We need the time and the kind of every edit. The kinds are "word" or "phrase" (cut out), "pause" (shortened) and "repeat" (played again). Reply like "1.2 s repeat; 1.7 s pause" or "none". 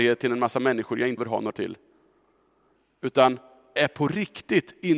1.2 s word; 1.5 s word; 3.8 s word